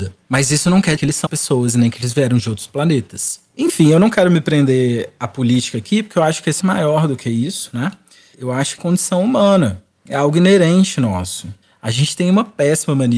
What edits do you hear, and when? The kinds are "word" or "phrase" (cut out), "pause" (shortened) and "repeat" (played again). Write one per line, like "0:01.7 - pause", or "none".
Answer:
0:01.0 - word
0:01.3 - word
0:06.6 - phrase
0:08.8 - phrase